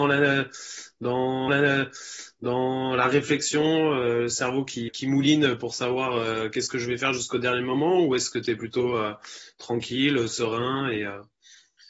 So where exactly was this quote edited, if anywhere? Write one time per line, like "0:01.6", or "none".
0:01.5
0:04.9